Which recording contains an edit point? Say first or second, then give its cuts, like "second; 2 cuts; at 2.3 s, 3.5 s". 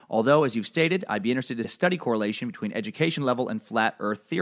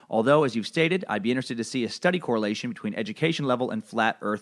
first; 1 cut; at 1.6 s